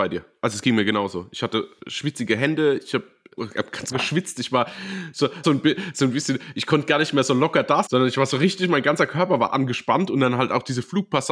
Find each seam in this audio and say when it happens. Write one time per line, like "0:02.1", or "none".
0:03.4
0:03.9
0:05.4
0:07.9

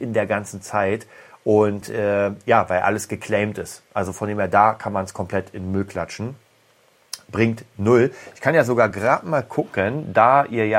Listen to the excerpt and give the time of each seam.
none

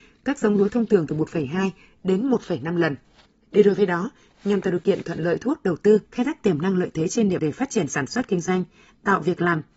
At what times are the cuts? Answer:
0:06.1
0:07.4

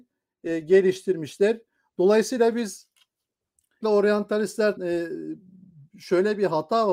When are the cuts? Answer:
0:03.8
0:04.8

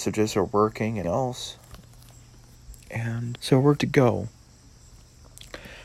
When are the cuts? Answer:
0:01.0
0:03.3
0:03.8

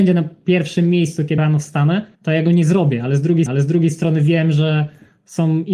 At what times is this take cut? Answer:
0:01.4
0:02.1
0:03.5

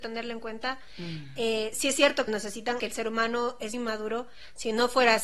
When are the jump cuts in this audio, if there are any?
0:02.3
0:02.8
0:03.7

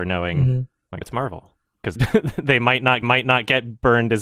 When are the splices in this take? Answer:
0:01.0
0:02.0
0:03.0

